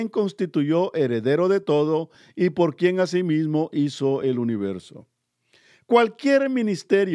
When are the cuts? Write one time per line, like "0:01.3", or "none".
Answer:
none